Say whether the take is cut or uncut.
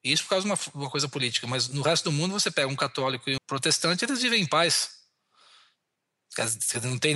cut